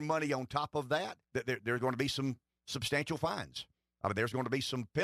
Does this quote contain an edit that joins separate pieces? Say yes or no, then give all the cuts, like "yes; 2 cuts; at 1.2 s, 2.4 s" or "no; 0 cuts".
yes; 1 cut; at 1.2 s